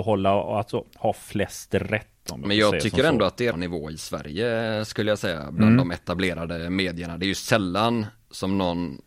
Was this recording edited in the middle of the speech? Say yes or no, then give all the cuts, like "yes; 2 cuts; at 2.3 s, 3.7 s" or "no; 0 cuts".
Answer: yes; 1 cut; at 3.5 s